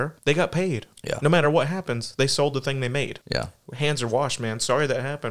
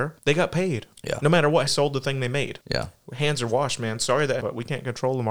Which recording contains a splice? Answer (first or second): second